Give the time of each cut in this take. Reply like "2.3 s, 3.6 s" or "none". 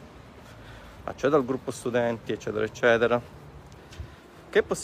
none